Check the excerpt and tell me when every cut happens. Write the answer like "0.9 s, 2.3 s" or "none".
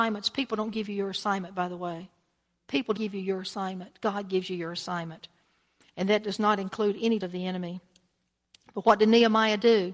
3.0 s, 7.2 s